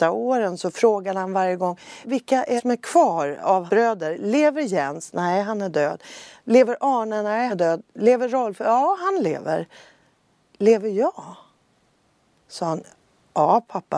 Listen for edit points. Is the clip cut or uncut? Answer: cut